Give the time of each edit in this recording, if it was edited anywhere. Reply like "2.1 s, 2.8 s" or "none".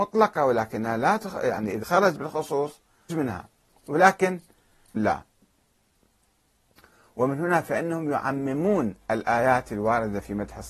1.8 s, 2.2 s, 3.1 s, 5.0 s